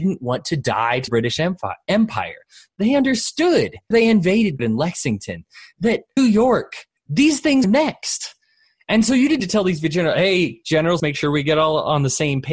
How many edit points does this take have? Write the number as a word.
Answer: eight